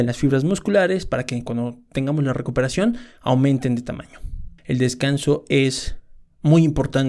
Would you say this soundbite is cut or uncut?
uncut